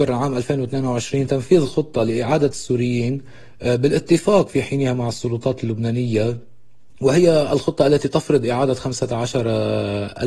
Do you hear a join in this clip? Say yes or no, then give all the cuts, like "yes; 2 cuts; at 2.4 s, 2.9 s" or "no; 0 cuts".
no; 0 cuts